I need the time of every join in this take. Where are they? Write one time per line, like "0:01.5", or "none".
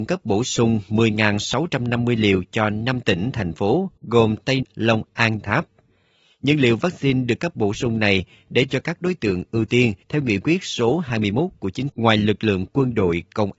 0:04.0
0:04.6
0:05.0
0:05.4
0:08.7
0:10.0
0:11.9